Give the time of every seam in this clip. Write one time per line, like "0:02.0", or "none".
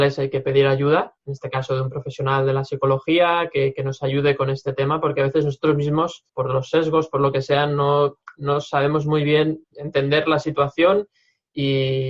0:01.2
0:06.3
0:09.6